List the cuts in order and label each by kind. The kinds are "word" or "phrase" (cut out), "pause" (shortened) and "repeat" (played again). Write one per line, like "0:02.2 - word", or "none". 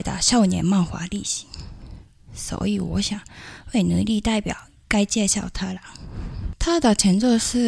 none